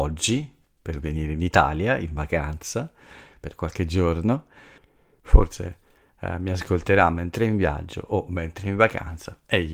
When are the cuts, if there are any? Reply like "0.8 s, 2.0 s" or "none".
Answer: none